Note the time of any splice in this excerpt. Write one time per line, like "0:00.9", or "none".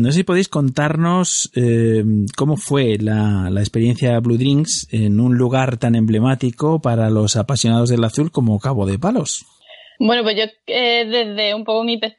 none

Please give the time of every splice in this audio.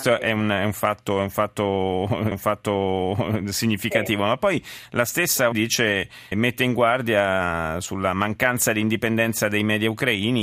0:02.3
0:05.5
0:06.3

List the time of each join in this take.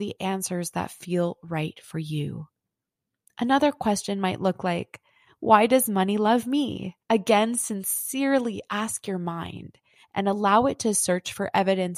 0:07.0

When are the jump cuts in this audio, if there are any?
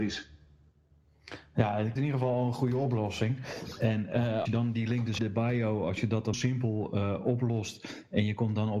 0:02.0
0:04.5
0:05.2
0:06.3

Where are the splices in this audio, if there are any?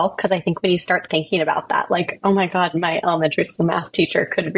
none

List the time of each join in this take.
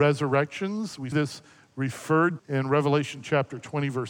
0:01.1
0:02.4

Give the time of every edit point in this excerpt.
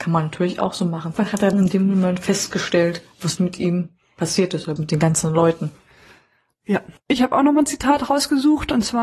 0:01.2
0:01.5
0:03.4
0:04.8

